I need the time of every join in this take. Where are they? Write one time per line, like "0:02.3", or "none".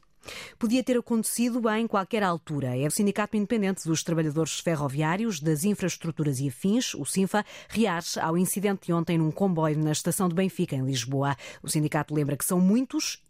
0:02.9